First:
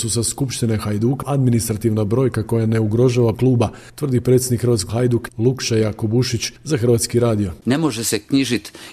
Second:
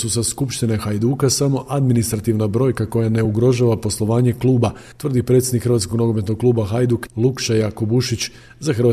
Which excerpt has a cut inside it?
first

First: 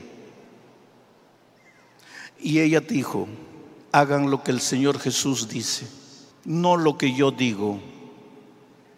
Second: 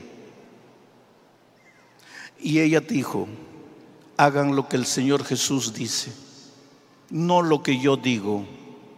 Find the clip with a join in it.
first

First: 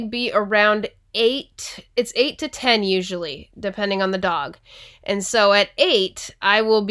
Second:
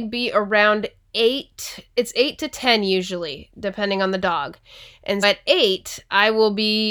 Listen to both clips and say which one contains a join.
second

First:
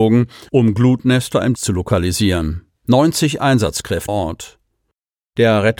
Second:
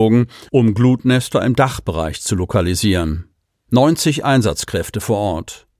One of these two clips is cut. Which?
first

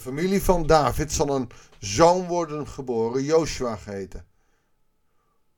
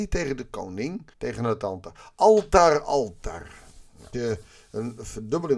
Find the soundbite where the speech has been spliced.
second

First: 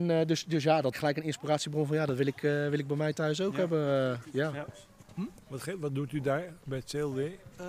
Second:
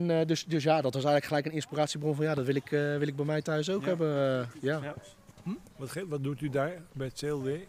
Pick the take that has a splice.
first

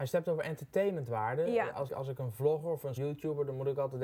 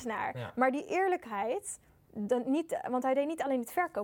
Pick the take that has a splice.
first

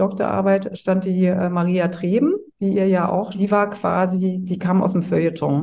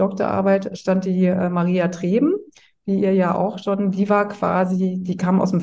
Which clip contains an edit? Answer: first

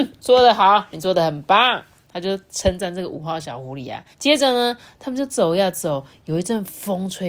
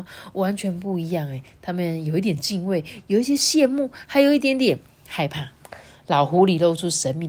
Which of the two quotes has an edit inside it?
first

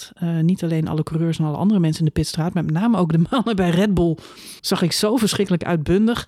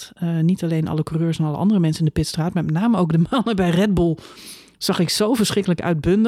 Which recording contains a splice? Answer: first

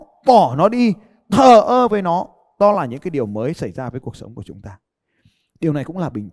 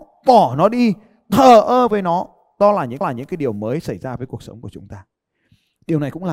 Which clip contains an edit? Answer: second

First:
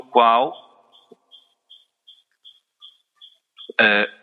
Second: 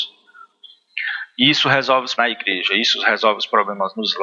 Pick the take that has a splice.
second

